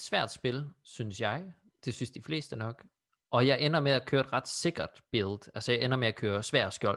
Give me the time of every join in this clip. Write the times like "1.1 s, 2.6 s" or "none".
none